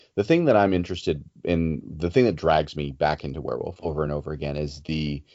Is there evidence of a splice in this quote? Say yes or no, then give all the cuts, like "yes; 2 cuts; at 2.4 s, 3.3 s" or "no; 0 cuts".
no; 0 cuts